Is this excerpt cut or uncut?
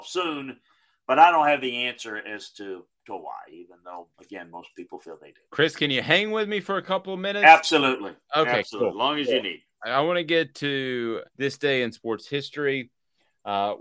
cut